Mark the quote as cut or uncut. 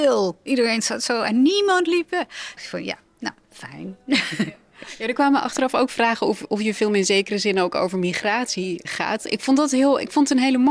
cut